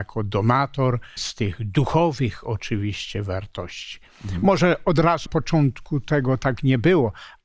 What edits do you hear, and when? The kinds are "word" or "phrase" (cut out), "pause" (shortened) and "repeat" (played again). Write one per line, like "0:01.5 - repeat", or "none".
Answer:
0:01.2 - word
0:05.3 - word